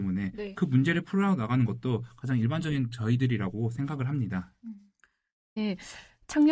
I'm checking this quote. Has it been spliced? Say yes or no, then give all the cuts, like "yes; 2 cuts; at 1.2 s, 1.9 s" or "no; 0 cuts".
no; 0 cuts